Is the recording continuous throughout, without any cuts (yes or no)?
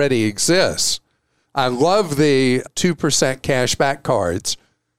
yes